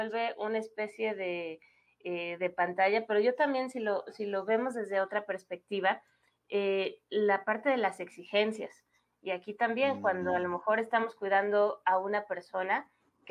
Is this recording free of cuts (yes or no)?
yes